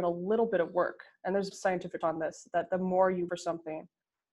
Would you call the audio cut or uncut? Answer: cut